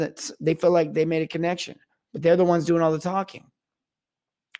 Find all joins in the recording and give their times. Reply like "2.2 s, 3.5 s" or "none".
1.9 s